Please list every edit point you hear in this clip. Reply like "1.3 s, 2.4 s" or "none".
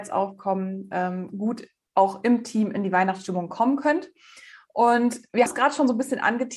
5.5 s